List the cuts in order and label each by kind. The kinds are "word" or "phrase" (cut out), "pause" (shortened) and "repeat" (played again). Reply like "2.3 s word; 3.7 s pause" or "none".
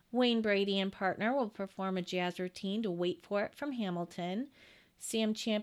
none